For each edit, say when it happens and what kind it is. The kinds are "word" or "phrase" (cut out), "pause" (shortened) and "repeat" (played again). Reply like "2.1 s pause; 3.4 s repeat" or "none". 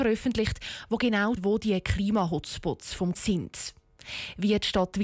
1.4 s word; 3.2 s word

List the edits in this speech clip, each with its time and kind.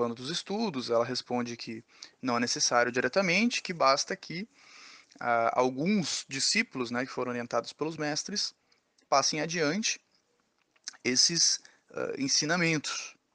none

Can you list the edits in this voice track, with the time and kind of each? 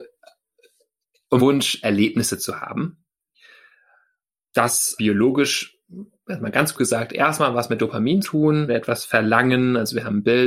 1.4 s word; 1.8 s word; 5.0 s word; 6.8 s word; 8.2 s word; 8.7 s word

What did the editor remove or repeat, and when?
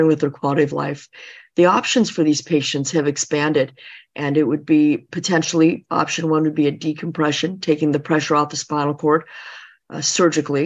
5.1 s word

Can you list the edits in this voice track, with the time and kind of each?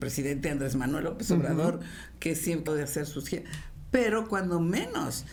2.7 s phrase

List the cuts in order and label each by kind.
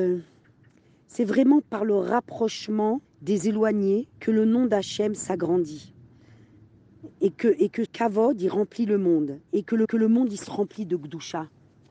3.0 s pause; 4.1 s pause; 7.1 s pause; 7.9 s word; 9.5 s pause; 9.8 s repeat

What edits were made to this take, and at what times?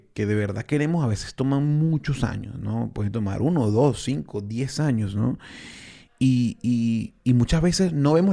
none

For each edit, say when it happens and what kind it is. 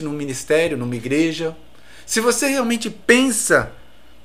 none

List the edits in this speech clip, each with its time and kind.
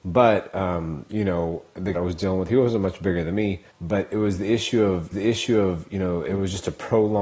1.9 s phrase; 3.7 s pause; 5.1 s repeat

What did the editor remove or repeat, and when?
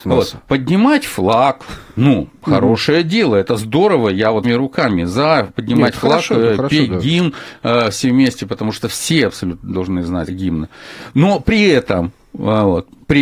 4.4 s word; 10.3 s word

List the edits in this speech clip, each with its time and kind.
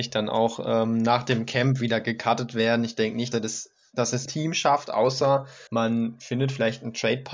3.3 s word; 4.3 s word; 5.7 s pause

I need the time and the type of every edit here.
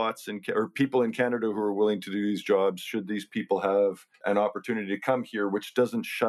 4.1 s pause

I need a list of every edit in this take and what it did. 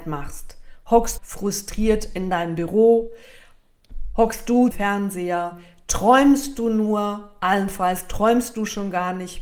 1.2 s phrase; 4.7 s phrase

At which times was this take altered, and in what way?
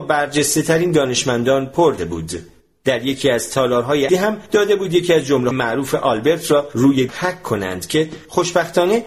2.0 s word; 4.1 s word; 5.5 s word; 7.1 s word

